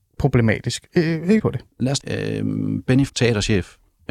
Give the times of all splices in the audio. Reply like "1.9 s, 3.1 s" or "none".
1.4 s, 2.0 s, 3.1 s